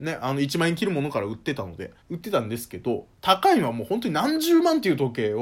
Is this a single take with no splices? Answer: no; 1 cut; at 2.0 s

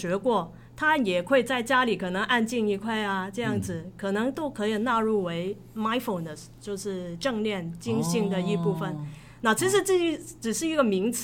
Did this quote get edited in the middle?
no; 0 cuts

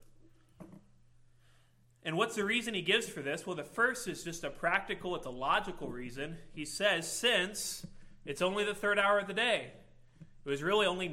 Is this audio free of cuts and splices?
yes; 0 cuts

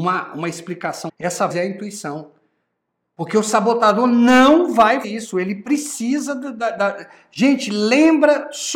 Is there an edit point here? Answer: yes; 3 cuts; at 1.1 s, 1.5 s, 5.0 s

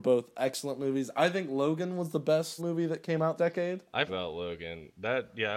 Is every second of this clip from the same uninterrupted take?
no; 3 cuts; at 2.6 s, 3.4 s, 4.1 s

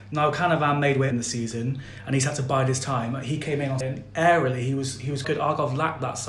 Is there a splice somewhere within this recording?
yes; 3 cuts; at 1.1 s, 3.8 s, 5.2 s

